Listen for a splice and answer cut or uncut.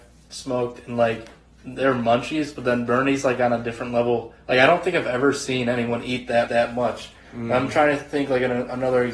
cut